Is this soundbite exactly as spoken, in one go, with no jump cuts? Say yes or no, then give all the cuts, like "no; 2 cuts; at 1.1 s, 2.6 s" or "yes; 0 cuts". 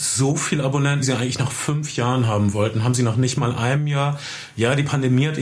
no; 1 cut; at 1.0 s